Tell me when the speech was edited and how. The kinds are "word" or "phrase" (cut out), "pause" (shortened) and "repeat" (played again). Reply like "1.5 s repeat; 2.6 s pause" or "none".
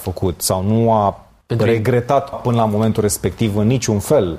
1.4 s pause; 2.3 s word